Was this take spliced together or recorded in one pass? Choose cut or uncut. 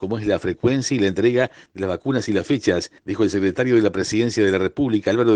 cut